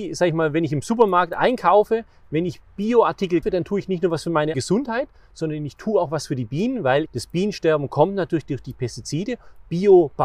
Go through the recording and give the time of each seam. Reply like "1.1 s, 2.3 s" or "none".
3.4 s, 4.5 s, 7.1 s